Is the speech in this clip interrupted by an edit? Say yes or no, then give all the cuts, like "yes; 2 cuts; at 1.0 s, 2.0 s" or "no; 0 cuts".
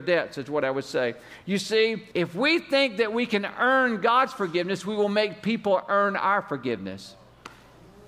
yes; 1 cut; at 2.1 s